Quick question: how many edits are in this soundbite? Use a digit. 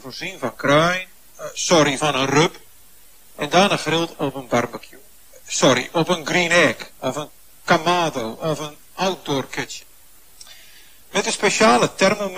0